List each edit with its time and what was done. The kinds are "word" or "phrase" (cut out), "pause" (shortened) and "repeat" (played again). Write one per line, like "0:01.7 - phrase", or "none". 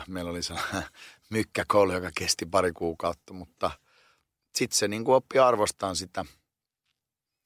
none